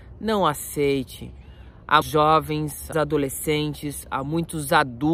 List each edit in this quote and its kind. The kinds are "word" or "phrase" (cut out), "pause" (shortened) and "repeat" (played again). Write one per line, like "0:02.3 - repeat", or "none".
0:02.0 - word
0:02.9 - word